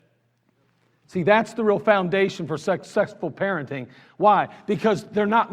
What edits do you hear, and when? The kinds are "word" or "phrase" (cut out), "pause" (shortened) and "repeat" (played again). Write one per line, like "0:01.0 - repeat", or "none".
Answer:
none